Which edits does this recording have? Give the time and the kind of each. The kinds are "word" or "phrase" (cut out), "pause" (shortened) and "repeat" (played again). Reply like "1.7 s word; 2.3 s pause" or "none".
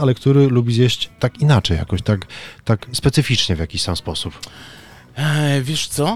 none